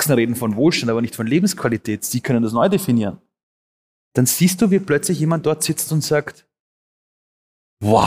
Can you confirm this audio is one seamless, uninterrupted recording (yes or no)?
yes